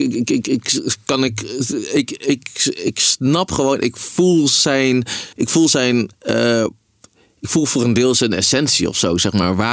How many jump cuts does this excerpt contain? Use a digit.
2